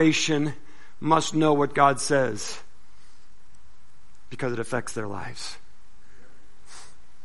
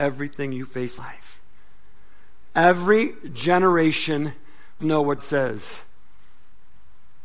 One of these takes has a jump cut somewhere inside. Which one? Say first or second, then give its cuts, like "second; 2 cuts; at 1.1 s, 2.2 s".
second; 3 cuts; at 1.0 s, 4.8 s, 5.2 s